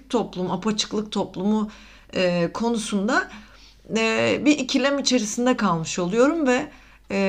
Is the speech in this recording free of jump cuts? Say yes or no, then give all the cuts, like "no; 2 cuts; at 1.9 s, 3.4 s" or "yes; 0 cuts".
yes; 0 cuts